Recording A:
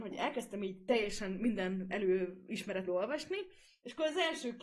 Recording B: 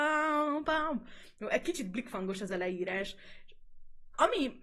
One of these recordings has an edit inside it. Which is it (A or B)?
A